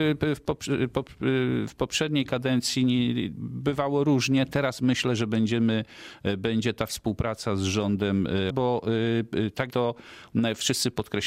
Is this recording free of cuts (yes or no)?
no